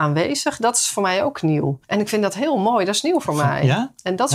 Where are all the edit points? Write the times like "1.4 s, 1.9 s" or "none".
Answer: 1.8 s